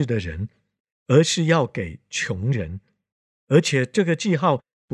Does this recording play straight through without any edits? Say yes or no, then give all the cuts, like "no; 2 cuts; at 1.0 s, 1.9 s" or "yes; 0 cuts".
yes; 0 cuts